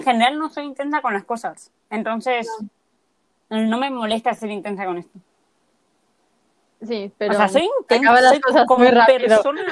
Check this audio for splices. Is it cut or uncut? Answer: uncut